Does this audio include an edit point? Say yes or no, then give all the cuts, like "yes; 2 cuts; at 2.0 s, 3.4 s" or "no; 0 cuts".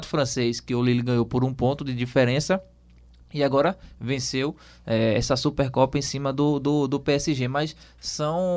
no; 0 cuts